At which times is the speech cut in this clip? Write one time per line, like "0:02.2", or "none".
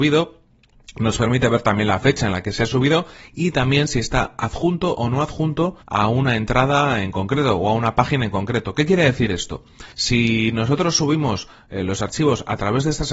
0:05.8
0:09.9